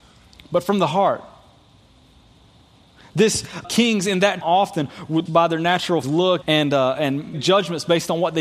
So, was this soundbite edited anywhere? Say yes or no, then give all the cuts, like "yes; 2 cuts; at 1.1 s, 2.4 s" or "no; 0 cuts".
yes; 6 cuts; at 3.6 s, 4.4 s, 5.3 s, 6.0 s, 6.4 s, 7.3 s